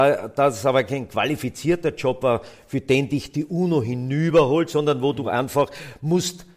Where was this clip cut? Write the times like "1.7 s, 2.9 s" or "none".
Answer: none